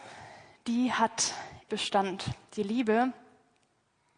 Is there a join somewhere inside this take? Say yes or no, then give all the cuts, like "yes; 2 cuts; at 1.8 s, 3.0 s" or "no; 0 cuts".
yes; 1 cut; at 1.7 s